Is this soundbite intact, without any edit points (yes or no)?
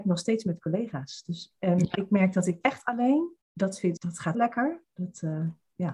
no